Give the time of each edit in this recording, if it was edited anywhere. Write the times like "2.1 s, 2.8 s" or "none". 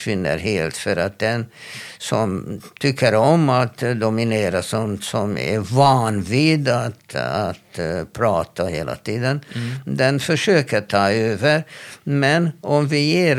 none

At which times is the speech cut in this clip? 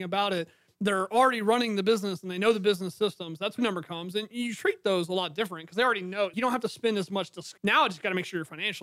3.6 s, 6.3 s, 7.6 s

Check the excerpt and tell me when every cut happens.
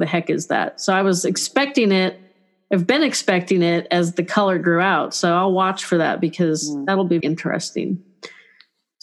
7.2 s

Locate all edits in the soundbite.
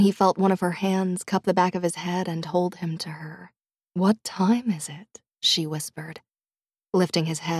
3.7 s

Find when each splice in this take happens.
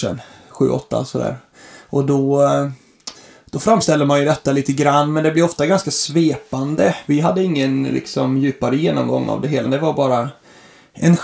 9.6 s

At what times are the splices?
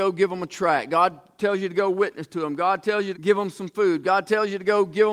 3.1 s

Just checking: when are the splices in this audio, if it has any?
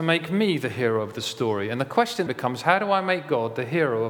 2.3 s

